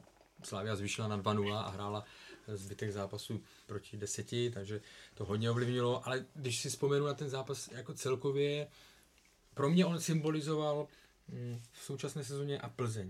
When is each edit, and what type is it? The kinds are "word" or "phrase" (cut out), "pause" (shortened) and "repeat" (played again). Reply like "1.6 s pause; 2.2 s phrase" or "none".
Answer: 3.7 s word; 11.7 s word